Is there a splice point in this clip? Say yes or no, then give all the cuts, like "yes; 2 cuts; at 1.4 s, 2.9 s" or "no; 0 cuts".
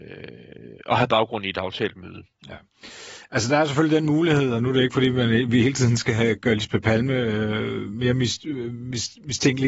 yes; 1 cut; at 6.4 s